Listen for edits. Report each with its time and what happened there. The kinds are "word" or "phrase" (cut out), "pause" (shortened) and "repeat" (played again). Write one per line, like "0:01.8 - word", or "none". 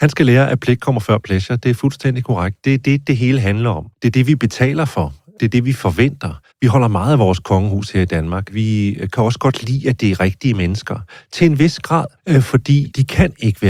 0:03.9 - pause
0:06.5 - pause
0:12.2 - pause

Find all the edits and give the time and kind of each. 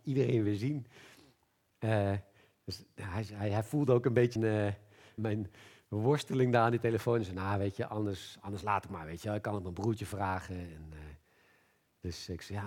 0:04.4 - word
0:05.2 - word

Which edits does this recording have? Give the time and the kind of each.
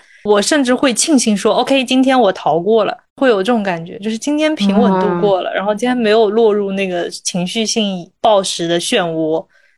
0:03.1 - pause

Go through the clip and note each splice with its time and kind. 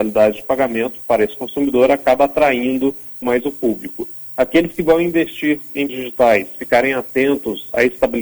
0:03.2 - phrase
0:05.9 - word

